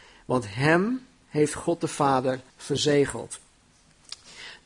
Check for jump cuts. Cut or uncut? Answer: cut